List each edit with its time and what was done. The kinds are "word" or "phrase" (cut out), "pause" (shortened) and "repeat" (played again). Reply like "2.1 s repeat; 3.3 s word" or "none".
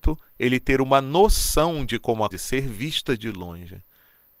2.3 s phrase

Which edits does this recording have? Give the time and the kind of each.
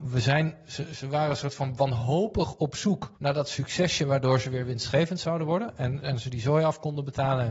3.2 s pause

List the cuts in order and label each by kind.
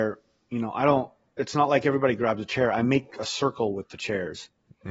none

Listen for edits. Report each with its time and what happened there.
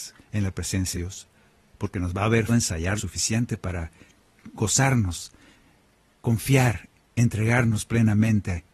0.9 s word; 2.5 s word; 3.0 s word

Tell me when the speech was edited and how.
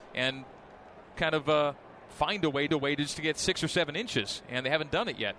1.1 s word; 2.7 s repeat

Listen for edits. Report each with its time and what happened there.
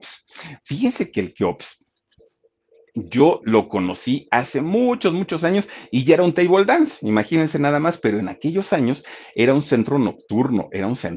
none

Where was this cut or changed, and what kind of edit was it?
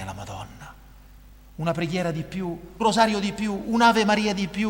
2.8 s word

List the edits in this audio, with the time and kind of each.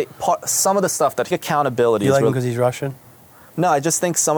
1.3 s phrase

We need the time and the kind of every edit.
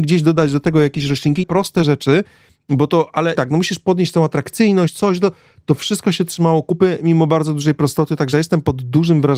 1.4 s word; 3.4 s word

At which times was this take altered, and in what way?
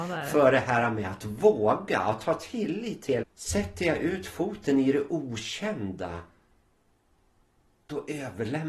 3.2 s word

